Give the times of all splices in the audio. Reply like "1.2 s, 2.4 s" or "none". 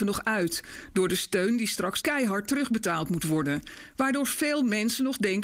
2.0 s